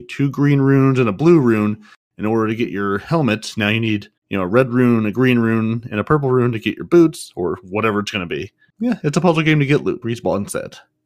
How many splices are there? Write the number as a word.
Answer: two